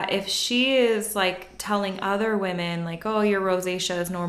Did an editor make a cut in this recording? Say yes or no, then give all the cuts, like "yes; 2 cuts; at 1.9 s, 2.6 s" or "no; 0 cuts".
no; 0 cuts